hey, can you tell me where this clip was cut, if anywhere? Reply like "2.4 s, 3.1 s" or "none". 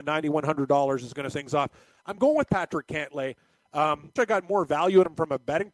1.3 s, 4.2 s